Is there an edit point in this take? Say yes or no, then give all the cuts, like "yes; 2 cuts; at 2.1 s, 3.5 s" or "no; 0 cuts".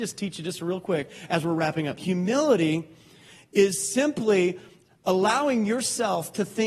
no; 0 cuts